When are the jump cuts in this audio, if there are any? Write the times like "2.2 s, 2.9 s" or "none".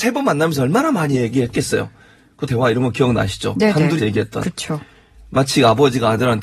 2.5 s, 4.0 s